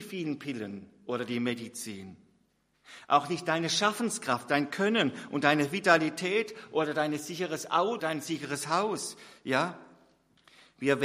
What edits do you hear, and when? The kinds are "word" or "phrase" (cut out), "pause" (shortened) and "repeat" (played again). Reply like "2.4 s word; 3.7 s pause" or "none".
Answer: 8.0 s word